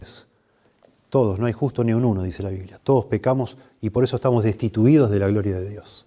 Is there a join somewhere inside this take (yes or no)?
no